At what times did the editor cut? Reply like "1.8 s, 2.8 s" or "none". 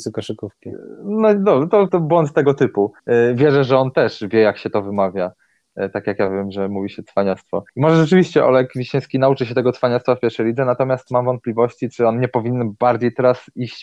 1.9 s, 3.0 s, 7.7 s

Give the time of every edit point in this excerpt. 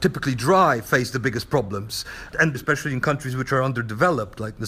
2.5 s

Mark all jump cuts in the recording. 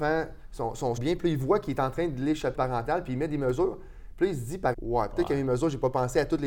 1.0 s, 2.5 s, 4.7 s

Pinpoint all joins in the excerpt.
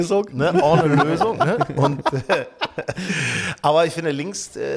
none

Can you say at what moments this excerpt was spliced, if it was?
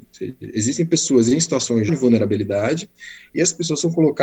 1.9 s

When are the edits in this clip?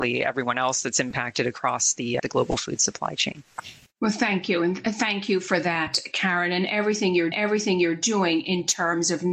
2.2 s, 3.9 s, 7.3 s

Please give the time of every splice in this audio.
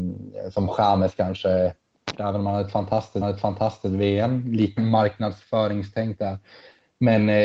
2.2 s, 3.2 s, 4.8 s

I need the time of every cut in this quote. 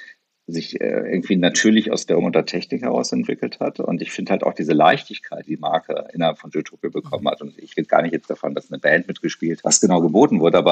2.2 s, 5.4 s, 9.6 s

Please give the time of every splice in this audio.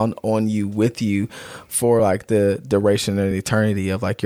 none

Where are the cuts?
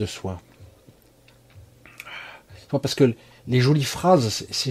none

